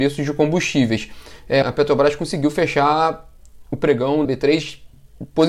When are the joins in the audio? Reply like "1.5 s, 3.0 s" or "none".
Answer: 1.6 s, 4.2 s